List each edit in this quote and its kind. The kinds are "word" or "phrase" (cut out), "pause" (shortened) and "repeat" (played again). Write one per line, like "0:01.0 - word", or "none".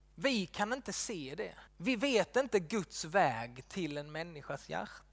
0:01.7 - pause